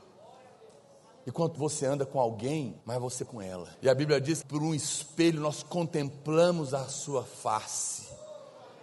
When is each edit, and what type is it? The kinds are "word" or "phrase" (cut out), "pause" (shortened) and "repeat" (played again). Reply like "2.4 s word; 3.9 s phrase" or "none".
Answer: 1.5 s word; 2.8 s pause; 3.3 s word; 3.7 s pause; 4.4 s phrase